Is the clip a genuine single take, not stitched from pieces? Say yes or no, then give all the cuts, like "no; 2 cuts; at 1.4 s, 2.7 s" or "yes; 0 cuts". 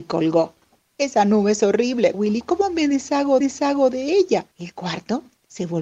no; 3 cuts; at 2.1 s, 3.4 s, 4.5 s